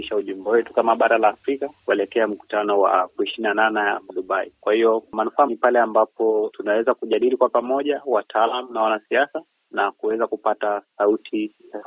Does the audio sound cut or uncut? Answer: cut